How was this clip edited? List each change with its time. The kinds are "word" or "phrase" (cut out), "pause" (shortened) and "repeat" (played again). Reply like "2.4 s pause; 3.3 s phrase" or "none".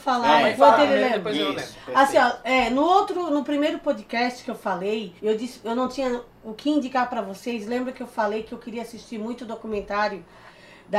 5.2 s pause

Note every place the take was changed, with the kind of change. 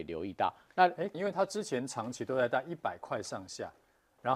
1.1 s phrase

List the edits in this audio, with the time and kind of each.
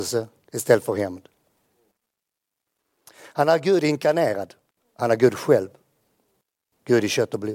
4.7 s pause

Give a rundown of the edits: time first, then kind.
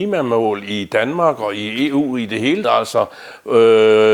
2.6 s word

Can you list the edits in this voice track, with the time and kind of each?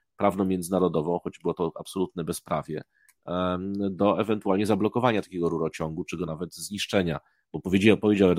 none

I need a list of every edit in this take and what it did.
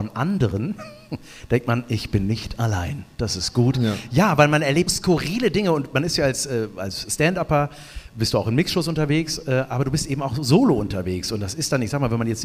4.9 s word

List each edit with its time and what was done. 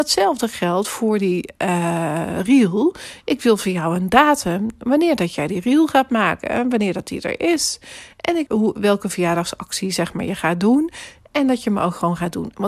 8.5 s phrase

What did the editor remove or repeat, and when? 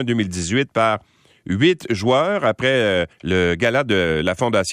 3.1 s pause

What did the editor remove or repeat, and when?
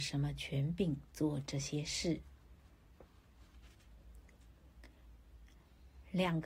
none

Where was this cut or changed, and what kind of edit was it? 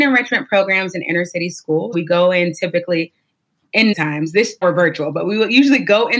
1.9 s word; 3.9 s word; 4.6 s word

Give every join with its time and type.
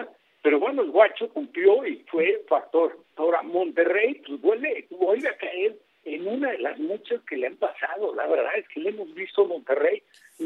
3.0 s pause

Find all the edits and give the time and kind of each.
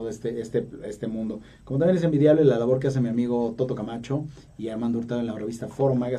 none

